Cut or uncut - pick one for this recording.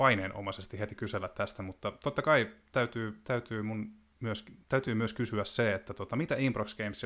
uncut